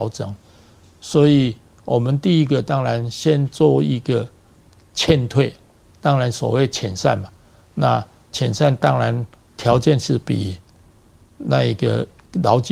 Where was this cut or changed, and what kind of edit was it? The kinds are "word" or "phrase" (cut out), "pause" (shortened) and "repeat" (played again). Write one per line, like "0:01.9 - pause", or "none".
none